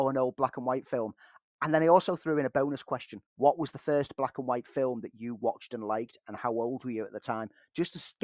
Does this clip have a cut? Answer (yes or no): yes